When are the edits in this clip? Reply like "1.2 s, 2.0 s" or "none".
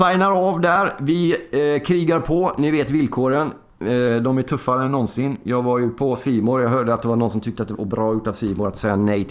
7.7 s